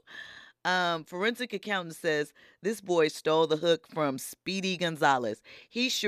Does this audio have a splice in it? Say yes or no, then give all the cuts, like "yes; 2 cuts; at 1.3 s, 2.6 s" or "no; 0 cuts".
no; 0 cuts